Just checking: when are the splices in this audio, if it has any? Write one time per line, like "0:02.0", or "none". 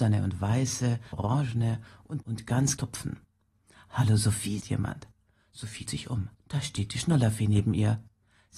0:01.1
0:02.2
0:02.8
0:04.6
0:05.9
0:06.4